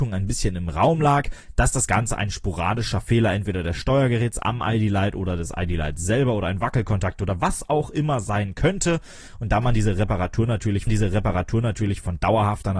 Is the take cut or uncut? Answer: cut